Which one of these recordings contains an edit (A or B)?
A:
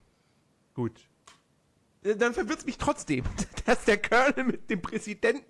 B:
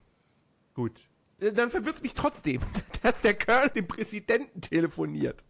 B